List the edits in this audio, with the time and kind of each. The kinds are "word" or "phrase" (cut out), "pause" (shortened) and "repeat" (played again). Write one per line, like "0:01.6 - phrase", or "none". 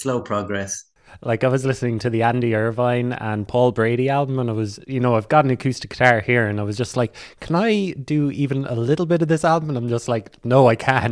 none